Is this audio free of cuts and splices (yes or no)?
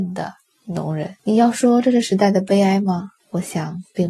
no